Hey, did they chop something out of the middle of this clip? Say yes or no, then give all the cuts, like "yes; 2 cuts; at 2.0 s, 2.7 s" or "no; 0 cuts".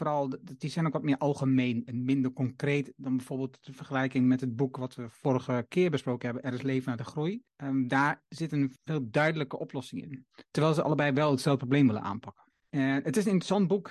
yes; 3 cuts; at 7.5 s, 8.8 s, 12.5 s